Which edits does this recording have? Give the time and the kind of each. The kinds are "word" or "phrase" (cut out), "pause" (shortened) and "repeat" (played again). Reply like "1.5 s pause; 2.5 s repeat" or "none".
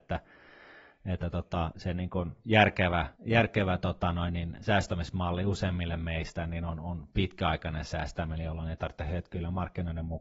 1.7 s word; 3.2 s pause